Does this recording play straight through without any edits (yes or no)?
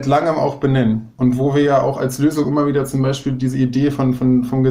yes